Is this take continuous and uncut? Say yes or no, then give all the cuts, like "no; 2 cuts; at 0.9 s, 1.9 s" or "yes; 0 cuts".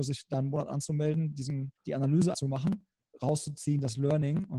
no; 3 cuts; at 1.8 s, 2.3 s, 3.1 s